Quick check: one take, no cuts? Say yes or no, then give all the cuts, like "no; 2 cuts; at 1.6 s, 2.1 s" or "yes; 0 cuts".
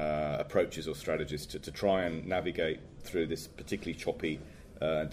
yes; 0 cuts